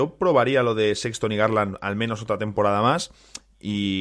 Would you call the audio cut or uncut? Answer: uncut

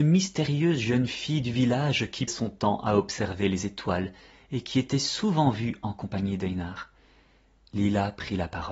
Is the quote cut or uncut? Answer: cut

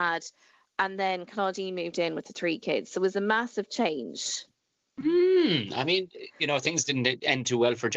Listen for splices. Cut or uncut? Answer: uncut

